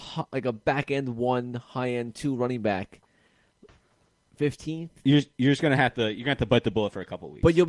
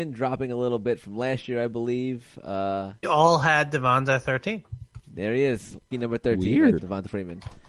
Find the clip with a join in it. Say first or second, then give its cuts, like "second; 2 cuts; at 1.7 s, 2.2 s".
second; 3 cuts; at 3.0 s, 5.9 s, 6.8 s